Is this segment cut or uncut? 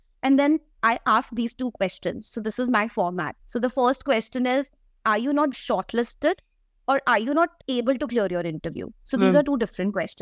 cut